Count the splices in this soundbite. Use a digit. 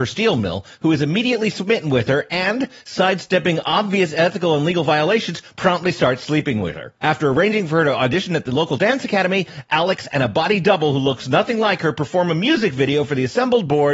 1